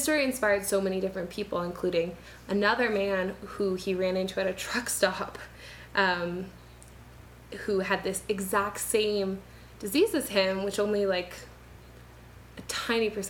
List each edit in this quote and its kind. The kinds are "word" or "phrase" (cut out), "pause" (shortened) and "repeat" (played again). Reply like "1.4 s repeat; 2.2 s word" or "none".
none